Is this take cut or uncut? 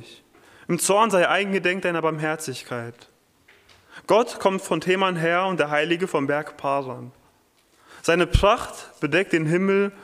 uncut